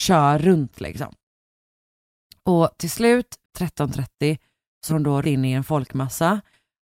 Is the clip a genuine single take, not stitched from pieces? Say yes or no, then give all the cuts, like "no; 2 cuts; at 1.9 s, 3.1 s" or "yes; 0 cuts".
no; 3 cuts; at 3.4 s, 4.9 s, 5.2 s